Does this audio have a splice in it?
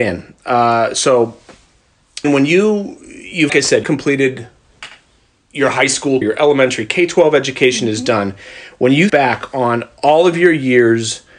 yes; 5 cuts; at 2.2 s, 3.5 s, 3.8 s, 6.2 s, 9.1 s

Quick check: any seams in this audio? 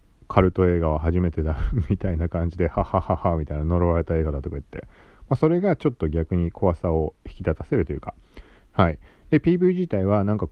no; 0 cuts

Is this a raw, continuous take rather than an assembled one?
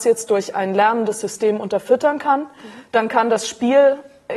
yes; 0 cuts

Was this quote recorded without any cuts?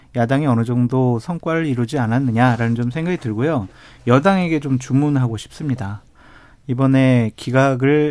yes; 0 cuts

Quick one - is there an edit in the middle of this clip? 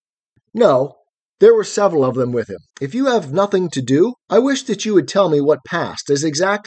yes; 1 cut; at 2.7 s

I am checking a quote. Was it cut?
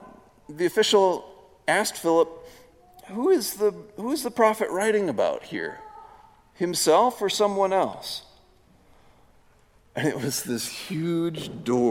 no; 0 cuts

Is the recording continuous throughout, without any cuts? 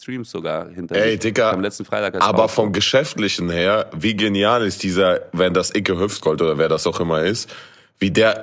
yes; 0 cuts

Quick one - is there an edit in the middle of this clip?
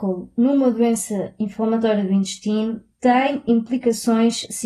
no; 0 cuts

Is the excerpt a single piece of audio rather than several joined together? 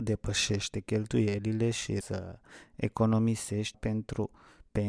no; 2 cuts; at 2.0 s, 3.7 s

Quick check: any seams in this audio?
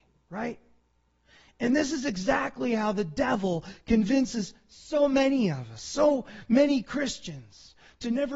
no; 0 cuts

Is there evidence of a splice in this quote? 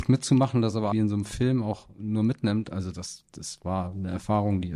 yes; 1 cut; at 0.9 s

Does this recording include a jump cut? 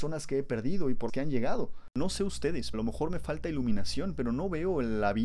yes; 2 cuts; at 1.1 s, 2.7 s

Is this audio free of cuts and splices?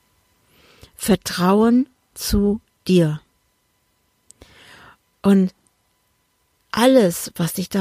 yes; 0 cuts

